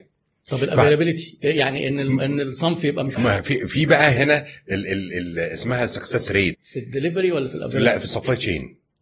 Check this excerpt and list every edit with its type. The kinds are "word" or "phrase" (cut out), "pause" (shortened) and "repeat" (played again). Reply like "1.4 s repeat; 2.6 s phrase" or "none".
3.2 s word; 4.2 s word